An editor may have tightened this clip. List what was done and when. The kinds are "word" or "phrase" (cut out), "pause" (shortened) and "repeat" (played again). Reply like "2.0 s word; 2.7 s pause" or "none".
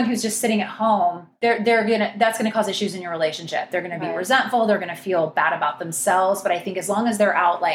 none

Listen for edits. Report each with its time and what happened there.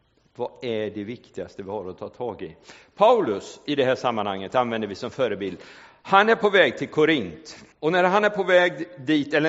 7.7 s pause

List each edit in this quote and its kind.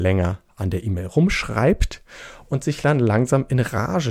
none

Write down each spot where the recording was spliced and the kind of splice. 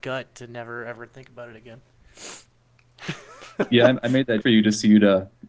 4.4 s word

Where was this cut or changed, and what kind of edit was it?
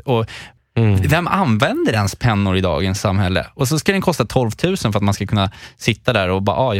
none

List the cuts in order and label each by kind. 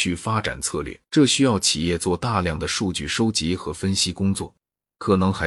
1.1 s pause

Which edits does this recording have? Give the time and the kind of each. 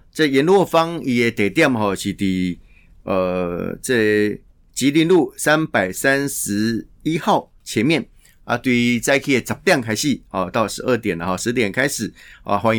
none

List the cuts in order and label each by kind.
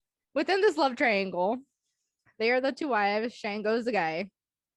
none

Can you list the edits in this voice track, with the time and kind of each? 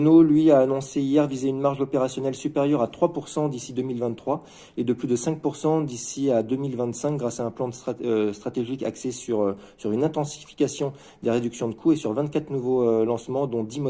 none

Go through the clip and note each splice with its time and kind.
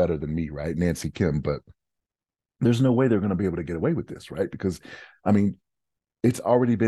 none

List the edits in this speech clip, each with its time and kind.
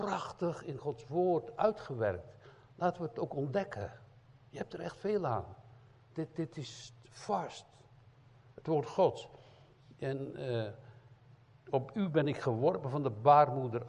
none

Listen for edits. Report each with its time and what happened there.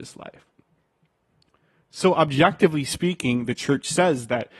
none

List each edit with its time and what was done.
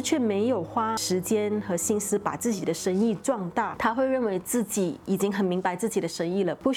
none

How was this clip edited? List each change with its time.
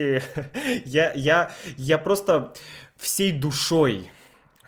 none

